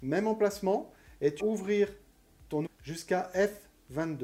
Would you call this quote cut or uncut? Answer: cut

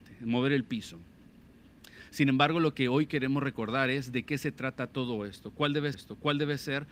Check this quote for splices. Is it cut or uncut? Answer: cut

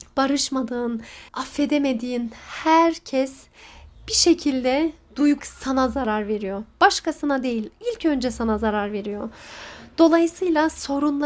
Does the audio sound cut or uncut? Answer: cut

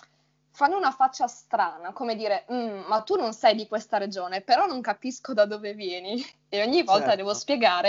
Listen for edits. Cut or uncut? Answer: uncut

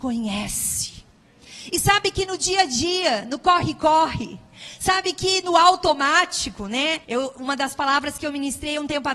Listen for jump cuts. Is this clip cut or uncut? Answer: cut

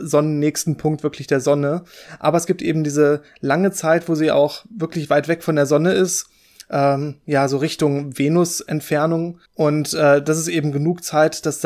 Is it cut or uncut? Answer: cut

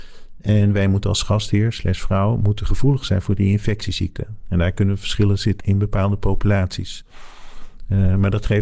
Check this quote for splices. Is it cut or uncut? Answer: cut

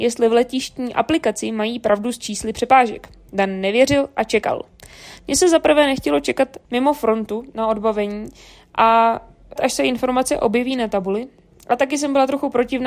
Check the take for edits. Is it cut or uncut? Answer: cut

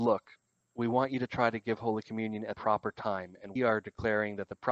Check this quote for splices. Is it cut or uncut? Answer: cut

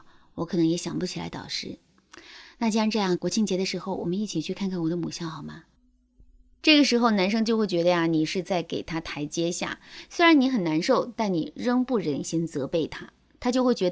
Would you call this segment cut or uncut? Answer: cut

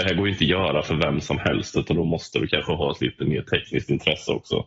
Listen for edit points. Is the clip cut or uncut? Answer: uncut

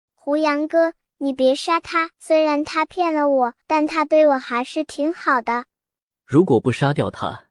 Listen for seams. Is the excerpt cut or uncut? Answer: cut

